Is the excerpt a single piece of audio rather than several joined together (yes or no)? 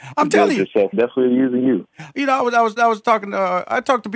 no